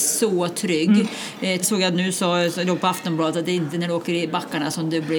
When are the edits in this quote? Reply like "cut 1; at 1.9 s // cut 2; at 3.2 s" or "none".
cut 1; at 1.6 s